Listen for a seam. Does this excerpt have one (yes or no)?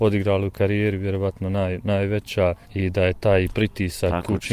yes